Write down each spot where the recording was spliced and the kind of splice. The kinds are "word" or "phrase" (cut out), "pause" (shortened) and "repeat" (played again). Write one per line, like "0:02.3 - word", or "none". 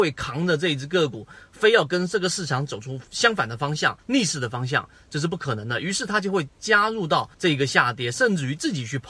0:03.1 - pause
0:04.0 - pause
0:07.3 - pause